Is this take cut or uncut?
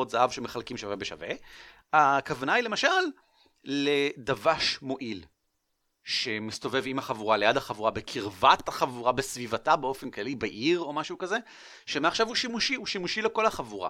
uncut